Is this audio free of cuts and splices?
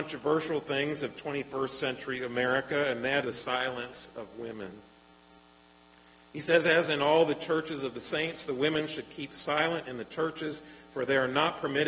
no; 1 cut; at 3.2 s

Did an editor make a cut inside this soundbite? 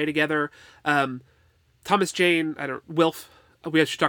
no; 0 cuts

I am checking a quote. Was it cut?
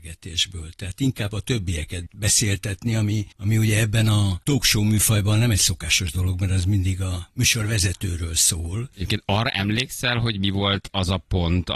yes; 2 cuts; at 3.3 s, 4.4 s

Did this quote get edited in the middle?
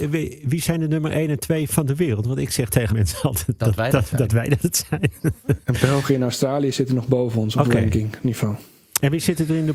yes; 2 cuts; at 2.9 s, 3.6 s

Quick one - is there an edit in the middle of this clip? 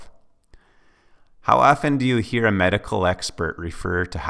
no; 0 cuts

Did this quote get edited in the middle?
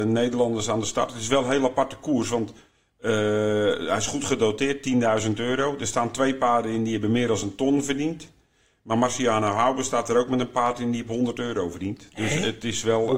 no; 0 cuts

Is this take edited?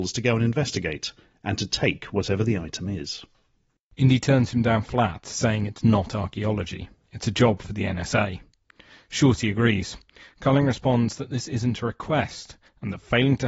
no; 0 cuts

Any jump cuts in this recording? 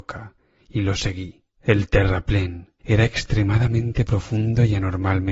yes; 2 cuts; at 1.5 s, 2.8 s

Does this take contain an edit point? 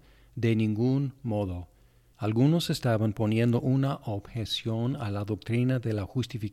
no; 0 cuts

